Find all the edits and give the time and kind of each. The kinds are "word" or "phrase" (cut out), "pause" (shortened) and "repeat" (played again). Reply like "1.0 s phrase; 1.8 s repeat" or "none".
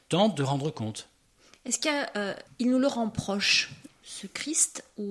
none